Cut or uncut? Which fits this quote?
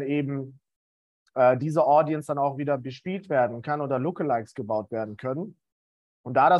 uncut